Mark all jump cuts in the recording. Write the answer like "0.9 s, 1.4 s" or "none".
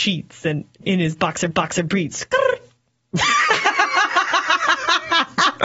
1.5 s